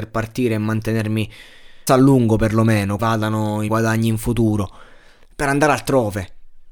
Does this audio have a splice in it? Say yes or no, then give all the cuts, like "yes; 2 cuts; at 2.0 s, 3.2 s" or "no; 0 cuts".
yes; 4 cuts; at 1.9 s, 3.0 s, 3.7 s, 5.3 s